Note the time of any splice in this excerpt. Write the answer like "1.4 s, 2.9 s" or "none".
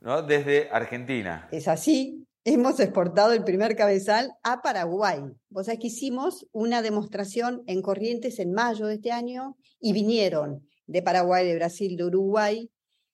none